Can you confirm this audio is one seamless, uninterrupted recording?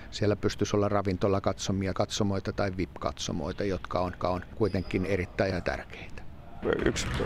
no; 3 cuts; at 1.9 s, 4.2 s, 5.5 s

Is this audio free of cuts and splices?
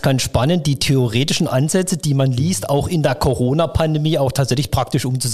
yes; 0 cuts

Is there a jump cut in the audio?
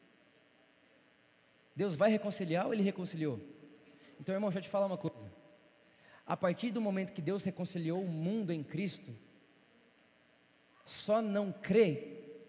no; 0 cuts

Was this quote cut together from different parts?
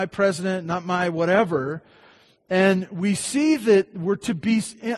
no; 0 cuts

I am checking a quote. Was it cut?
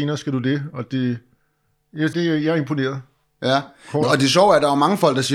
yes; 2 cuts; at 2.1 s, 4.0 s

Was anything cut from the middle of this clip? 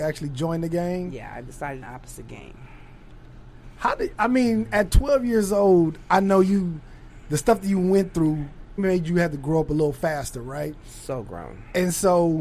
yes; 2 cuts; at 1.8 s, 8.8 s

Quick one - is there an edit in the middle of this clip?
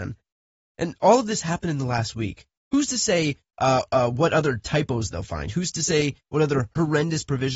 no; 0 cuts

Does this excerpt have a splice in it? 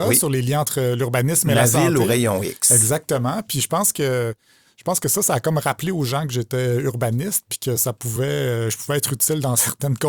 no; 0 cuts

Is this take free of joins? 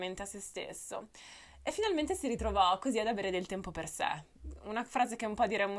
yes; 0 cuts

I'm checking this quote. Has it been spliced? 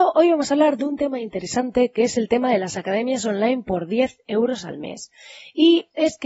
no; 0 cuts

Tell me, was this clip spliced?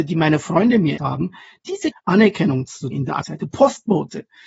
yes; 4 cuts; at 1.0 s, 1.9 s, 2.9 s, 3.2 s

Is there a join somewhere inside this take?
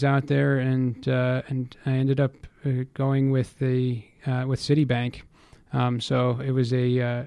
no; 0 cuts

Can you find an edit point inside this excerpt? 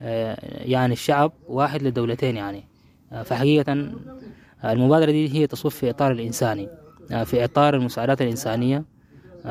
no; 0 cuts

